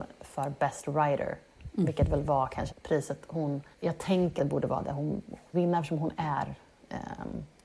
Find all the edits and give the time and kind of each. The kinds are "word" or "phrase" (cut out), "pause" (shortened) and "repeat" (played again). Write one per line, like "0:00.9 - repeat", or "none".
0:02.7 - word
0:03.7 - pause
0:04.4 - word
0:05.5 - phrase